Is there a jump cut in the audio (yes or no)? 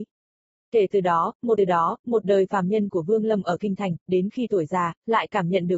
yes